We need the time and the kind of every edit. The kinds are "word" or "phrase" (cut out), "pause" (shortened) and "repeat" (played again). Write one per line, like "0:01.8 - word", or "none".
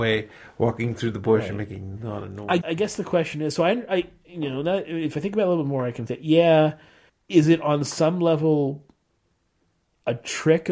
0:02.6 - word
0:06.1 - word
0:07.1 - pause